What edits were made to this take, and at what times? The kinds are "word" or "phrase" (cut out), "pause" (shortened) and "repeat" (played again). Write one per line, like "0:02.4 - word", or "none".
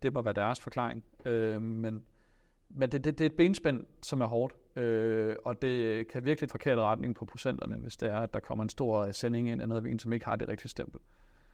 0:06.5 - phrase